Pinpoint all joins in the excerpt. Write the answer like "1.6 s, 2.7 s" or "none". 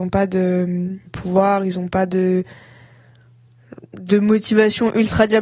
1.1 s